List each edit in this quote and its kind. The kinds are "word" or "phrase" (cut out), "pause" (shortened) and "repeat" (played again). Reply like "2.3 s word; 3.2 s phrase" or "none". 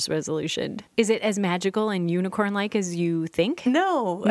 0.9 s pause